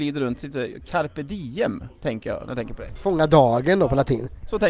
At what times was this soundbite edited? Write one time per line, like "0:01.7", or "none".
none